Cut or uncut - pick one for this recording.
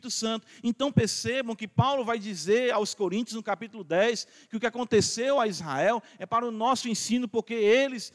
uncut